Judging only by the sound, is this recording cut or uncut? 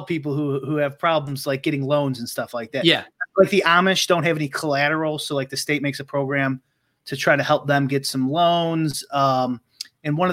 uncut